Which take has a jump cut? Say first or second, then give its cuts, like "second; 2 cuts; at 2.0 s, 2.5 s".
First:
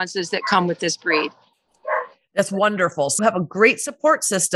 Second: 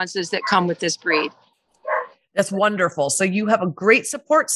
first; 1 cut; at 3.2 s